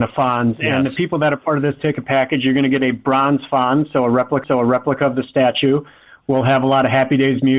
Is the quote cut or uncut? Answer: cut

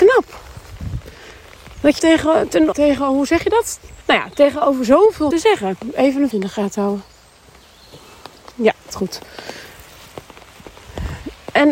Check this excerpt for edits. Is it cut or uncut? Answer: cut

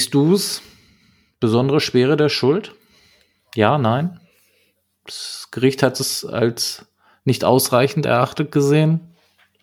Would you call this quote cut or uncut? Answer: uncut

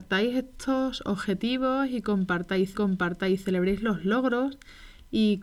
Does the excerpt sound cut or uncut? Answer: cut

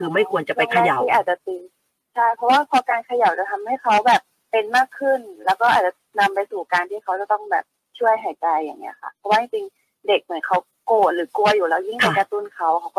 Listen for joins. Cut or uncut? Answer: uncut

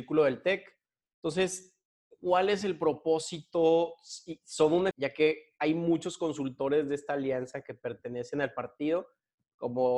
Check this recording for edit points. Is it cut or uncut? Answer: cut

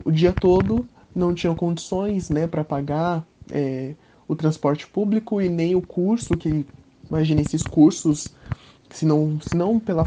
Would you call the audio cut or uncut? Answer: uncut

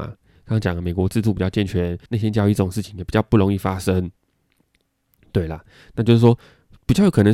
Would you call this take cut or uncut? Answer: cut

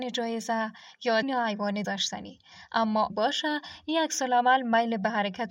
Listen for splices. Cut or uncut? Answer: cut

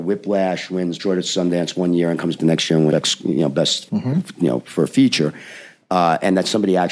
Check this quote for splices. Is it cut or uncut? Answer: cut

